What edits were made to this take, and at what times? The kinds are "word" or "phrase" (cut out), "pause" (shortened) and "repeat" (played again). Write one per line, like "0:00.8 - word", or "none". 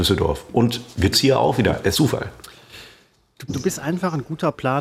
0:01.1 - word
0:01.9 - word
0:03.5 - word